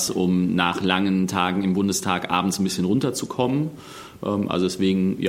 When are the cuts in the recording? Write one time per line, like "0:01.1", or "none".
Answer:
none